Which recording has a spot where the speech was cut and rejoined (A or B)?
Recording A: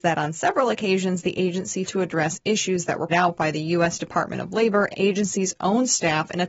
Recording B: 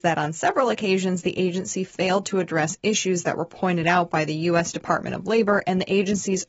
A